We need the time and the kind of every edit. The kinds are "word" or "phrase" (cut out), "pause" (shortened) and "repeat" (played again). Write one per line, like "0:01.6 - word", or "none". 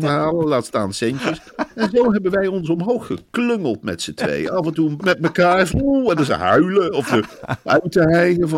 0:05.0 - phrase
0:05.7 - word
0:06.3 - phrase